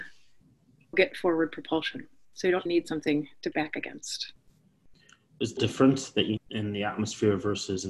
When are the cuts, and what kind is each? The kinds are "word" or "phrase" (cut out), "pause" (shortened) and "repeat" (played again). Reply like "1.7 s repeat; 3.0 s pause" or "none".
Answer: 0.9 s word; 2.7 s word; 3.5 s word; 5.6 s word; 6.4 s word